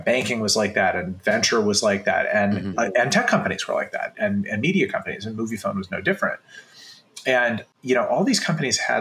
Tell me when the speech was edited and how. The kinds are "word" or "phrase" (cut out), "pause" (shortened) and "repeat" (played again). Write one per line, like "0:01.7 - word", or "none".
none